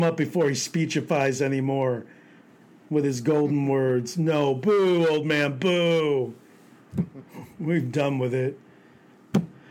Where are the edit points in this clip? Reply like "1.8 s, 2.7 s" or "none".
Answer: none